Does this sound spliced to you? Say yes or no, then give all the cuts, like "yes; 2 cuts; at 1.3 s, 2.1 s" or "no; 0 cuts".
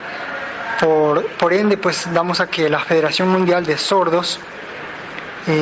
yes; 1 cut; at 2.5 s